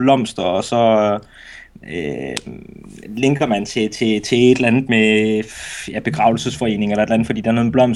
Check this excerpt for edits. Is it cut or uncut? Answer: uncut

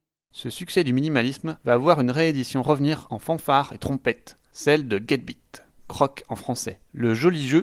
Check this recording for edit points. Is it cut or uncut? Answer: uncut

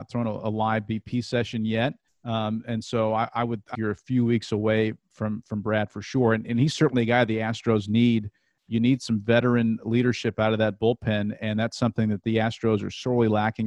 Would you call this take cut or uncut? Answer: cut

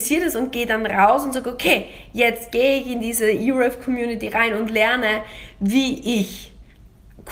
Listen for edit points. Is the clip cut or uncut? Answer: uncut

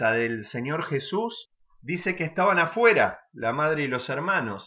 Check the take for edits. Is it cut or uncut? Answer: uncut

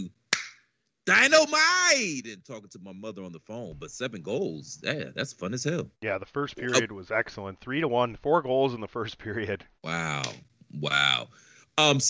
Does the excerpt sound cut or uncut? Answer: cut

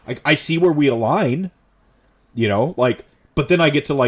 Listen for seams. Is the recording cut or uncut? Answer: uncut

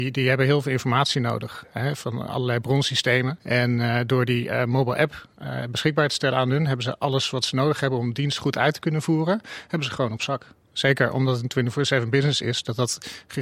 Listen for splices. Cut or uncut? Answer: uncut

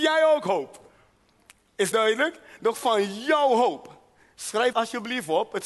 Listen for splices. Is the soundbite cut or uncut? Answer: cut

